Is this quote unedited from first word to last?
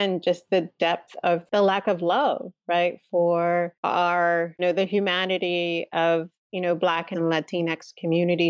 no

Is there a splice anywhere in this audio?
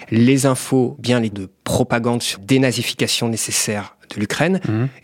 yes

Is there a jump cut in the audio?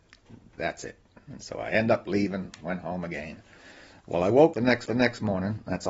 yes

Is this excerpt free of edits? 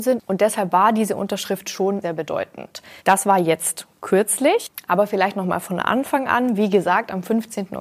no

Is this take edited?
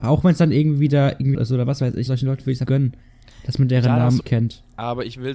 yes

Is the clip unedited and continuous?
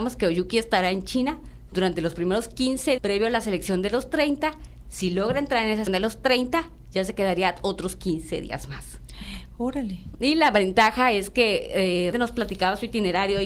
no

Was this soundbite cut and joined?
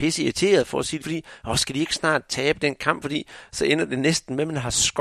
yes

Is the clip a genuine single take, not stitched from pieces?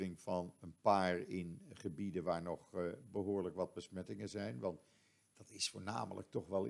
yes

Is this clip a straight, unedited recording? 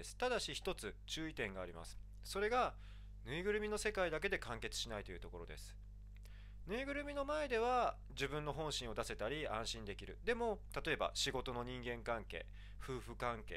yes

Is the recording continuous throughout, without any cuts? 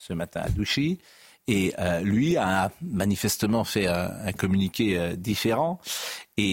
yes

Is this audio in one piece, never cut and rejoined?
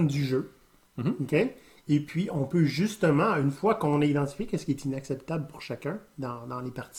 yes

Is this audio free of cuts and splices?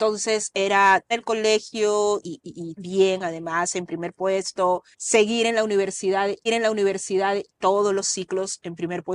no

